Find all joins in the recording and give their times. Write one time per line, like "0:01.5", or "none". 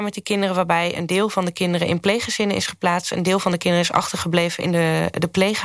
none